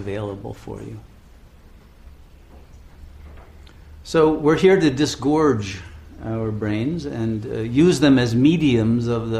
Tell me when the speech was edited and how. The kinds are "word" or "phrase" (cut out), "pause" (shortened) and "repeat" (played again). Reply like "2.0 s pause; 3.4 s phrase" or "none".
none